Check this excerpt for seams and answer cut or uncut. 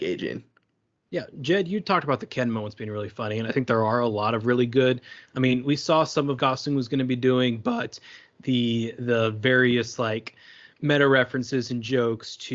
cut